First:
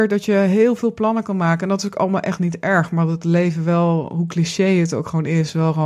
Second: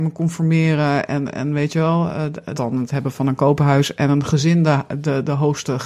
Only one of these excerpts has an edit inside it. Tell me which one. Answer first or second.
second